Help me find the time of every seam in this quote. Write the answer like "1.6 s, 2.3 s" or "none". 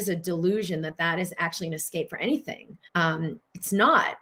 2.9 s